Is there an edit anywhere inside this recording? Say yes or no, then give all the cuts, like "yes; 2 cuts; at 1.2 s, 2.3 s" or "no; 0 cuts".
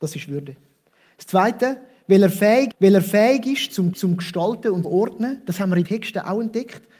yes; 4 cuts; at 2.7 s, 3.9 s, 4.8 s, 5.8 s